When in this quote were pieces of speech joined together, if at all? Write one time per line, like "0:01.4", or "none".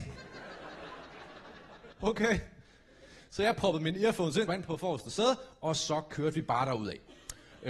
0:01.9
0:04.5